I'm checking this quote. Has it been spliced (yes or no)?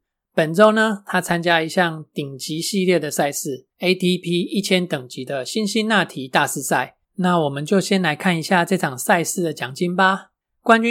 yes